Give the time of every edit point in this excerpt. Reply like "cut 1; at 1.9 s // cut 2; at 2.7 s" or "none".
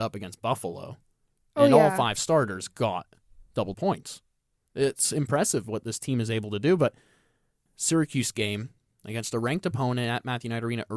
cut 1; at 3.7 s // cut 2; at 7.7 s